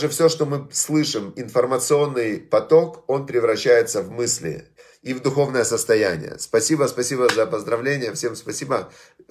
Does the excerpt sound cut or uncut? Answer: uncut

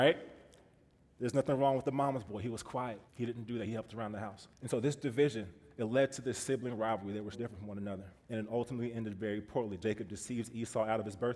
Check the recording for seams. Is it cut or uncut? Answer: cut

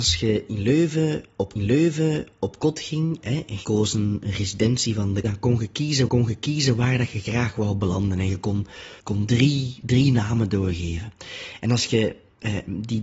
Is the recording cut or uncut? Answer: cut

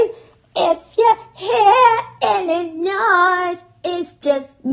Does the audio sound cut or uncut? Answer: uncut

